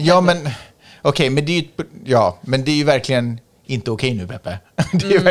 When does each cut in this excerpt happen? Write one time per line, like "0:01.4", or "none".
none